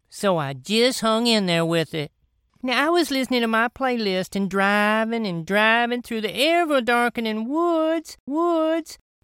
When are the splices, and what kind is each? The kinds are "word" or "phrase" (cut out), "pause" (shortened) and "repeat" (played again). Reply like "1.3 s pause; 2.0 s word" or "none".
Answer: 8.3 s repeat